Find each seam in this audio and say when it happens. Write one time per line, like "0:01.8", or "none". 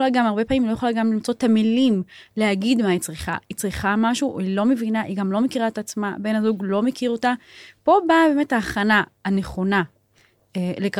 none